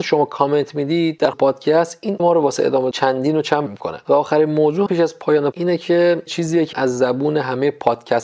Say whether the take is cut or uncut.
cut